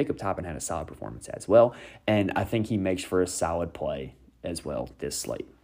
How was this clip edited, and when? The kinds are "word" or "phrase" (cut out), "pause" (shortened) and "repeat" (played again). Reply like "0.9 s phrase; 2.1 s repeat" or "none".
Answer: none